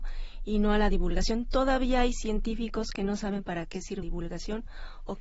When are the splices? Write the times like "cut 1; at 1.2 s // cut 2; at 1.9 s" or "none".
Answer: cut 1; at 4.0 s